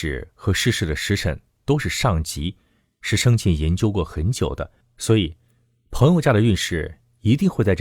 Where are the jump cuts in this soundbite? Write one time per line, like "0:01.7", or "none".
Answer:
none